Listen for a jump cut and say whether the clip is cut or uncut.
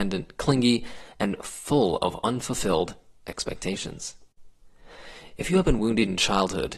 uncut